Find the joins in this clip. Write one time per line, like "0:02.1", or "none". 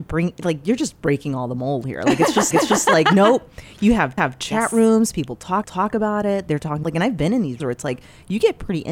0:02.5
0:04.2
0:05.6
0:06.8
0:07.6